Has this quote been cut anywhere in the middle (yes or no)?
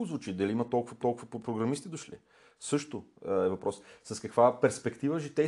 yes